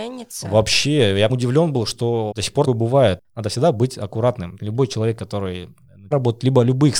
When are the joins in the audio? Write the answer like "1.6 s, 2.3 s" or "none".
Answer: 1.3 s, 2.3 s, 2.7 s, 6.1 s